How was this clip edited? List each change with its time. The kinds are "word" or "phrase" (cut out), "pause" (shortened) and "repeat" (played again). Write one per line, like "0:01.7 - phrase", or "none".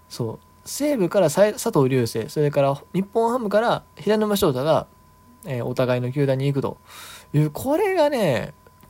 none